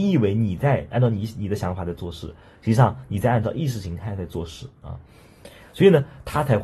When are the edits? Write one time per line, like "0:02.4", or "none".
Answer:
none